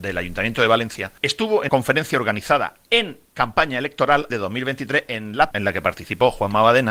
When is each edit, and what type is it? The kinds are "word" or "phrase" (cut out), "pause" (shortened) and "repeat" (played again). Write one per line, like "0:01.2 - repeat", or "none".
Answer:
0:01.2 - pause
0:01.7 - word
0:03.3 - pause
0:04.3 - word
0:05.5 - word